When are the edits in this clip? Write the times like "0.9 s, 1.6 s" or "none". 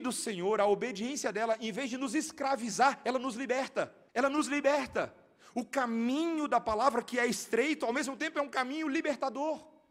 4.1 s